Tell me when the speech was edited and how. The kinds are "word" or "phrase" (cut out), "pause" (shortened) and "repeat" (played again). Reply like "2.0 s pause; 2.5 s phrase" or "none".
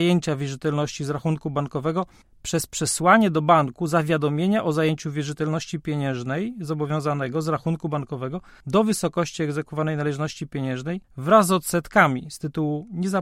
none